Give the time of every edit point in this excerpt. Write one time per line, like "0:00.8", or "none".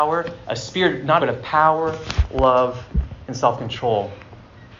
0:01.2

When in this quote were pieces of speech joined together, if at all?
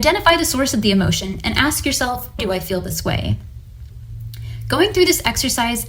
0:02.4

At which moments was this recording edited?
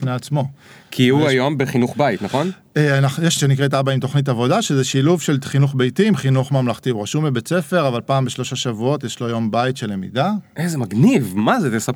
0:03.4

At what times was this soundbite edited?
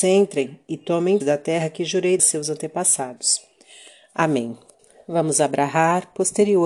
0:01.2
0:02.2
0:04.8

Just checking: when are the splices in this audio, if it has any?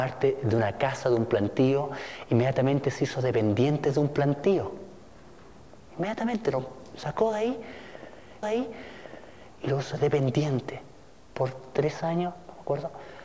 0:08.4

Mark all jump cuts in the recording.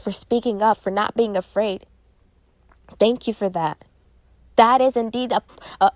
none

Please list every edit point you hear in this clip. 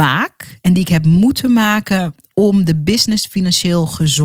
none

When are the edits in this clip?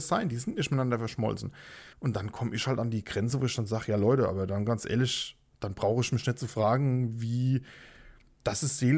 0:01.9

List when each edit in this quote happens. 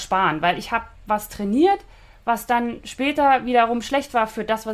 none

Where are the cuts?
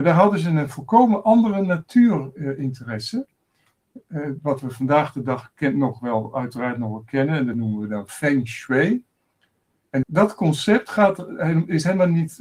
0:10.0

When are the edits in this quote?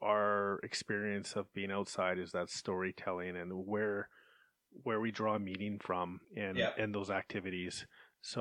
0:06.2

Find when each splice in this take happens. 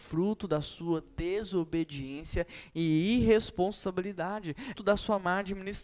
0:04.8

